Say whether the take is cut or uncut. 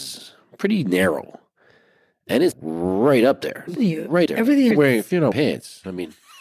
cut